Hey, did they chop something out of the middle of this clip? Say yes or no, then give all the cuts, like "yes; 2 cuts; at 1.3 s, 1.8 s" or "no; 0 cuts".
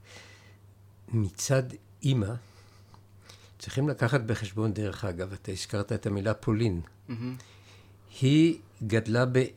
no; 0 cuts